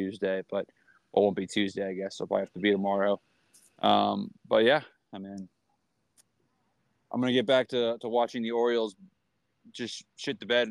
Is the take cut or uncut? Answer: uncut